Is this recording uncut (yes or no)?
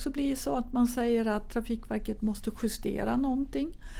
yes